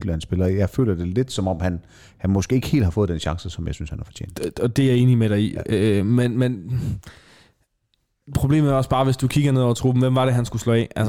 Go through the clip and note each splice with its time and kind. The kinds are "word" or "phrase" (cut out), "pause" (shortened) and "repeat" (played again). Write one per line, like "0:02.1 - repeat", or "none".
none